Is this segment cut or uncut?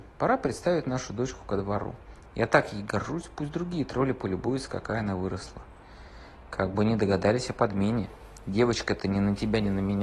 uncut